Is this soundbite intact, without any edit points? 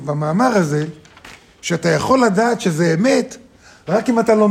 yes; 0 cuts

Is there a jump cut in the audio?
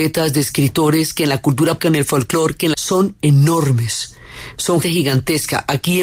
yes; 3 cuts; at 1.8 s, 2.7 s, 4.8 s

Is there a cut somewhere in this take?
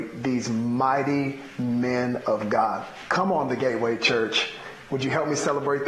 no; 0 cuts

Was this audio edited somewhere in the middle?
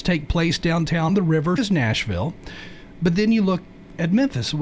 yes; 2 cuts; at 1.1 s, 1.6 s

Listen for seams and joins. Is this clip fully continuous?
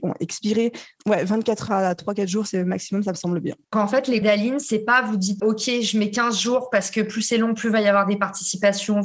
no; 4 cuts; at 1.7 s, 3.7 s, 4.2 s, 5.4 s

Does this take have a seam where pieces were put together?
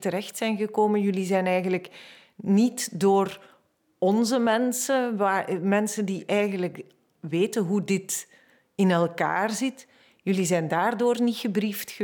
no; 0 cuts

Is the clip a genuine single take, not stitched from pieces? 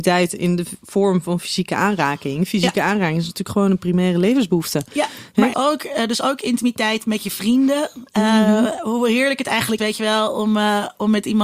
no; 2 cuts; at 5.5 s, 9.8 s

